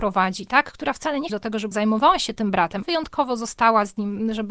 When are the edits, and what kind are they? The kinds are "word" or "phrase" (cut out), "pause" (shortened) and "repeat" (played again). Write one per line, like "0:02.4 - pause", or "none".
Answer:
0:01.3 - phrase
0:01.7 - word
0:02.8 - word

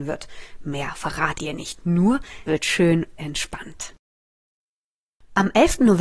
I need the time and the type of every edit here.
0:01.4 - word
0:02.5 - word
0:03.2 - word

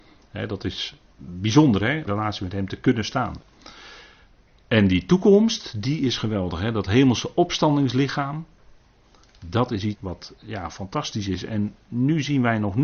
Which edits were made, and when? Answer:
0:02.1 - phrase
0:09.9 - word

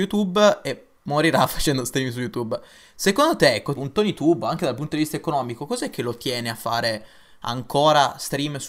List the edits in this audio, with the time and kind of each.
0:03.7 - word

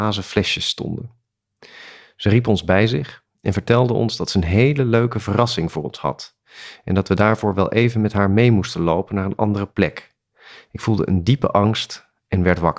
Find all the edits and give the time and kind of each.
none

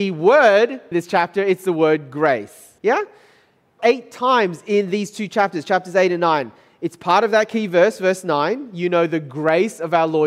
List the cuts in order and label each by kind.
0:00.9 - word
0:02.8 - pause
0:03.8 - phrase

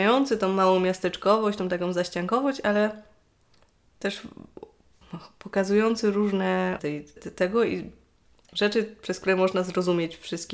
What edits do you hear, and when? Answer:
0:06.8 - word
0:07.2 - word

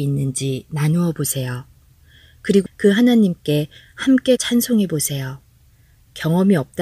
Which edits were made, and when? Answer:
0:02.7 - word
0:04.4 - word

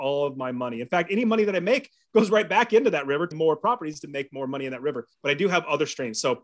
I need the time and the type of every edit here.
0:03.3 - word
0:05.1 - pause

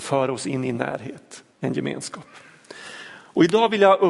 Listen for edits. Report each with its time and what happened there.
0:01.5 - pause

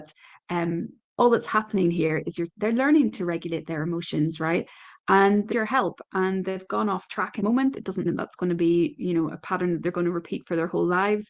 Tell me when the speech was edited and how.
0:02.5 - word
0:05.5 - word
0:07.4 - word
0:08.1 - word

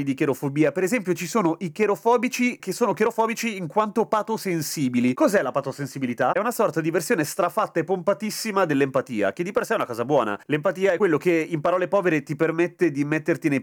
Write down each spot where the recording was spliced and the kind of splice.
0:02.6 - word
0:10.4 - pause

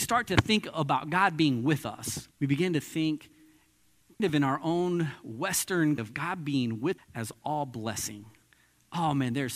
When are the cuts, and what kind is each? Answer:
0:02.3 - pause
0:04.2 - word
0:06.0 - word
0:07.0 - word

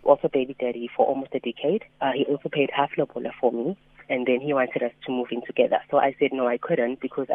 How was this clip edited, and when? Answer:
0:01.9 - pause

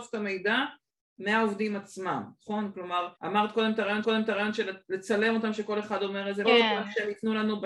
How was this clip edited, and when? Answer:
0:03.2 - pause
0:04.0 - repeat
0:06.4 - phrase

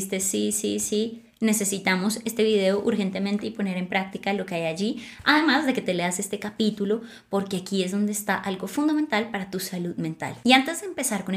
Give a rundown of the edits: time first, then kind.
none

